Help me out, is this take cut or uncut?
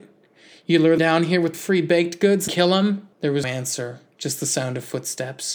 cut